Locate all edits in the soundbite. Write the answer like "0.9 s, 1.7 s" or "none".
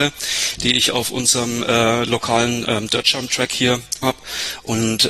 4.0 s